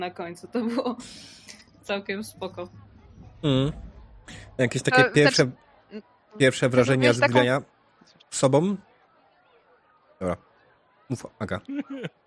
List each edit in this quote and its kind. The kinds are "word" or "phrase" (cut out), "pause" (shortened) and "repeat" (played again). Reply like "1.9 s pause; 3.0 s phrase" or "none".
none